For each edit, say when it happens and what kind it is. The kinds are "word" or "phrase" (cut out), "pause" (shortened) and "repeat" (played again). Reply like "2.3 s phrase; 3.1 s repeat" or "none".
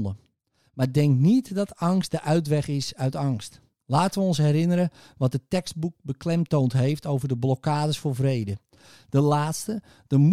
none